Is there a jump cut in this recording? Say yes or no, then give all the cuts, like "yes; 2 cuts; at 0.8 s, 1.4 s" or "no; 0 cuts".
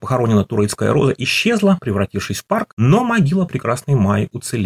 no; 0 cuts